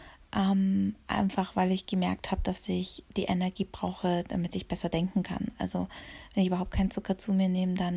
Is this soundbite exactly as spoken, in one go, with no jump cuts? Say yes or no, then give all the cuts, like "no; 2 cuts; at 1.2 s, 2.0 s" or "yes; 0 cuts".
yes; 0 cuts